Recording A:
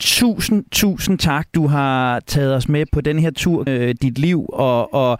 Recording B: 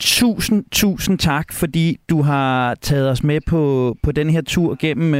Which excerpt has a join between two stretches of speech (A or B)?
A